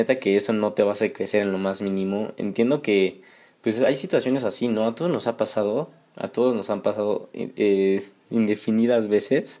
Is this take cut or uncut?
uncut